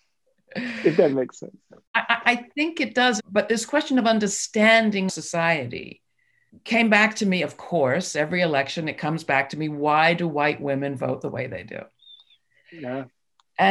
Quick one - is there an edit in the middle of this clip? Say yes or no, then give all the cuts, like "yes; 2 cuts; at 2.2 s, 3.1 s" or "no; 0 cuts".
yes; 2 cuts; at 5.1 s, 6.5 s